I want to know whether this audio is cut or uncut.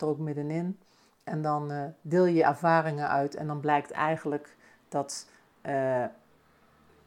uncut